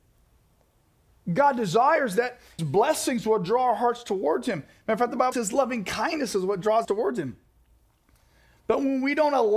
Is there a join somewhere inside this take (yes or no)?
yes